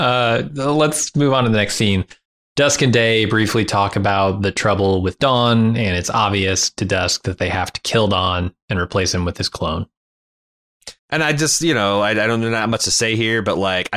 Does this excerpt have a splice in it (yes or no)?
yes